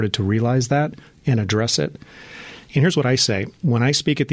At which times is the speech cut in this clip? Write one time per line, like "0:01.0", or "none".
none